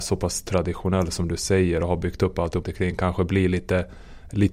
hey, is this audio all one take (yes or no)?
no